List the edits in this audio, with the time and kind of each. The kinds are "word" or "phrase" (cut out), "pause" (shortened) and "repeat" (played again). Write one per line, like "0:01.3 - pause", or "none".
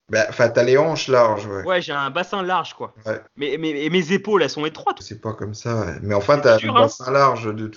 0:03.3 - pause
0:05.0 - phrase